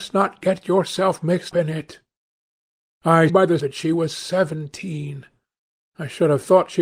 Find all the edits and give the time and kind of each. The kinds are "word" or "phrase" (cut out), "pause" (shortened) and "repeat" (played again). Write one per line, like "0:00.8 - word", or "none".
0:01.5 - word
0:03.3 - word
0:03.6 - word